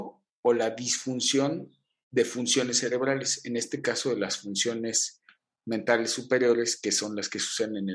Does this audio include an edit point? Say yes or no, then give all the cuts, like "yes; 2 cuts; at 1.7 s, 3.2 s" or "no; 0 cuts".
no; 0 cuts